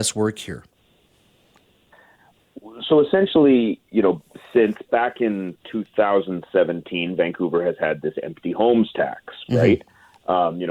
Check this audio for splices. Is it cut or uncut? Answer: uncut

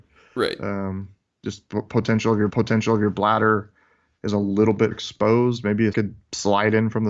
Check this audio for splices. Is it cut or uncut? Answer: cut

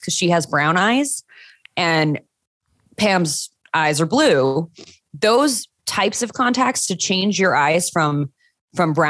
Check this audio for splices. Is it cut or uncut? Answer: uncut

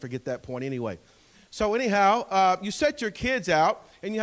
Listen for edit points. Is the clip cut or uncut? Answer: uncut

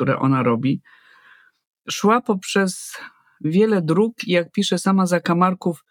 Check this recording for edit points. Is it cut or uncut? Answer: uncut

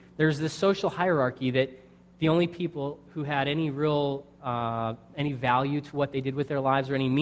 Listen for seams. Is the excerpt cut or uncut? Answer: uncut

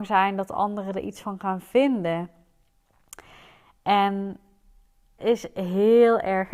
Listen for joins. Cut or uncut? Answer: cut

